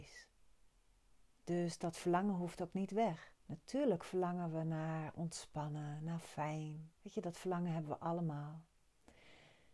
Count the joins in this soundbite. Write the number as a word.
two